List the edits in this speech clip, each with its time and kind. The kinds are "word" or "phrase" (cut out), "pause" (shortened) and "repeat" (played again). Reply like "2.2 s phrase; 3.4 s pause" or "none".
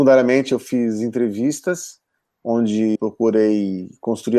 3.0 s word